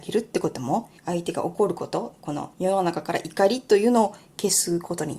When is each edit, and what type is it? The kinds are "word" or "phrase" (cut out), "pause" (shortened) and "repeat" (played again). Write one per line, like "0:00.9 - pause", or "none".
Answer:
0:01.0 - pause
0:02.5 - pause